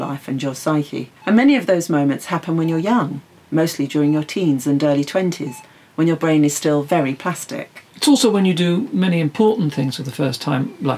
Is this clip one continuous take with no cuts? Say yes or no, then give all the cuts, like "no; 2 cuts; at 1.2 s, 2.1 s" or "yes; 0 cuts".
no; 1 cut; at 1.2 s